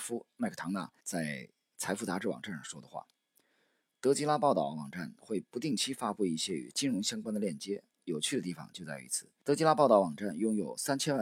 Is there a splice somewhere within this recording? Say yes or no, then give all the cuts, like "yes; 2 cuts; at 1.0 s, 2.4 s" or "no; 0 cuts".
yes; 2 cuts; at 1.0 s, 9.4 s